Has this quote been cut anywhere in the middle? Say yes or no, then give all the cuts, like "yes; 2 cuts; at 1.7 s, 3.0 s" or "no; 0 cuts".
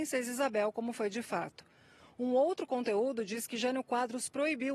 no; 0 cuts